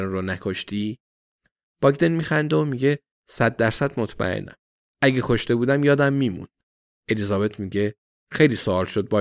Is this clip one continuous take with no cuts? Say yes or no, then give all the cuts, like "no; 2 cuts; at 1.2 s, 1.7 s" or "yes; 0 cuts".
yes; 0 cuts